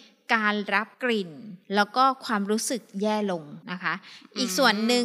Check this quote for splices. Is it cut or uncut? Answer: cut